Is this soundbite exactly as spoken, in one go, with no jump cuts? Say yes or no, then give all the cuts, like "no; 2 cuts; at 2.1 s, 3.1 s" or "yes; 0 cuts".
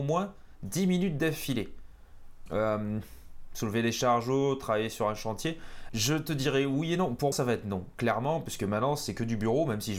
no; 3 cuts; at 2.5 s, 5.9 s, 7.3 s